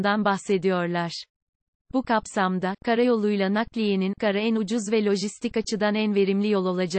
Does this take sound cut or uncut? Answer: cut